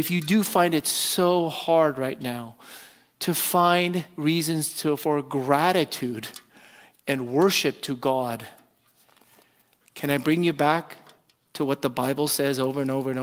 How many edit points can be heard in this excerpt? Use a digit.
0